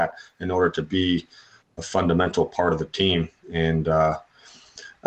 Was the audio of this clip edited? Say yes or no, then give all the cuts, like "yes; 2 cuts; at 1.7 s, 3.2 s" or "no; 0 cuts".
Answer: no; 0 cuts